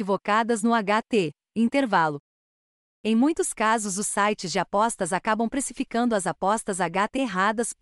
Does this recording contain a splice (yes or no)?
no